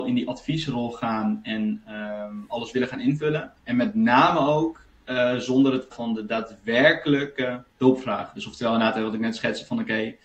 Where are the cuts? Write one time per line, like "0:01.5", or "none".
0:03.6
0:05.9
0:07.7